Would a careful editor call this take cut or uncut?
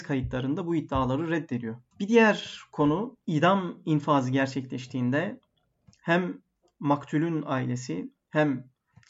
uncut